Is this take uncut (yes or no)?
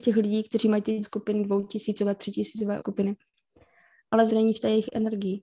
no